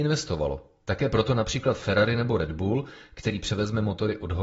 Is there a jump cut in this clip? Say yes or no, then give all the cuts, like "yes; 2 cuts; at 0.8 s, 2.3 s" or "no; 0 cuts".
no; 0 cuts